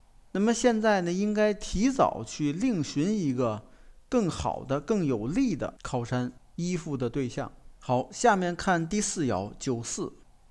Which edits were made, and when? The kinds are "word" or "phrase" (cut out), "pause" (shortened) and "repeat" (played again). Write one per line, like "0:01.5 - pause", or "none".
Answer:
0:07.7 - pause